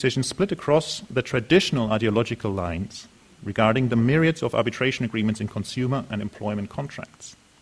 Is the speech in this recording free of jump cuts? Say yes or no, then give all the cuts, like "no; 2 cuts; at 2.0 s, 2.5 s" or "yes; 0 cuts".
yes; 0 cuts